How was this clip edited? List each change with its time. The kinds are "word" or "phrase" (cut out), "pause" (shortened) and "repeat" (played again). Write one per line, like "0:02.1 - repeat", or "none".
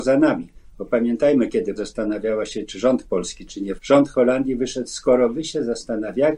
0:01.8 - word
0:03.8 - word